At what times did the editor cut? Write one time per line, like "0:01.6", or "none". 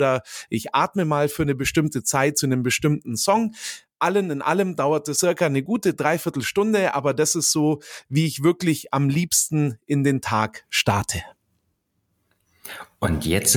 0:05.1

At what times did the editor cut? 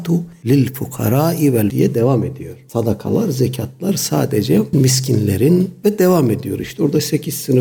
0:01.7
0:04.7

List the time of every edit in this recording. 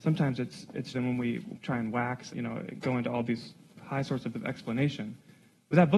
0:00.9
0:01.5
0:02.3
0:04.3

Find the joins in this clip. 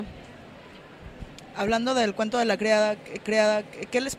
0:03.3

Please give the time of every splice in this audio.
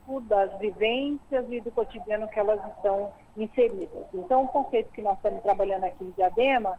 0:04.5

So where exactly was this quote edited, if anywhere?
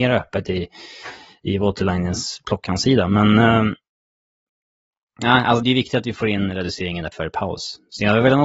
0:05.6
0:07.1

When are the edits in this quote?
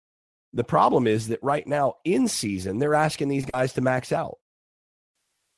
none

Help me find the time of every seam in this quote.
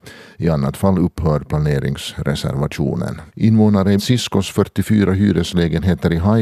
0:03.3
0:04.0

